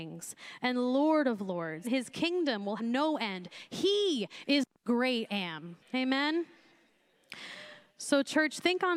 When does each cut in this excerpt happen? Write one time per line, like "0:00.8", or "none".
0:01.8
0:02.8
0:05.3
0:05.8